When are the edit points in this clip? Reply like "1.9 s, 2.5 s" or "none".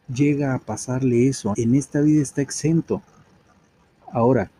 1.5 s